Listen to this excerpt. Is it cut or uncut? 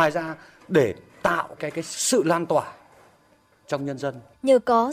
cut